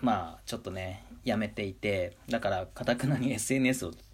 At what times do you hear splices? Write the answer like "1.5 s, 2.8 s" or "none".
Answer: 2.2 s